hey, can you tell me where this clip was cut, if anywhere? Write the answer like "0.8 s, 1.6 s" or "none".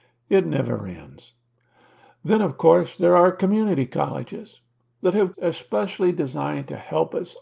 5.3 s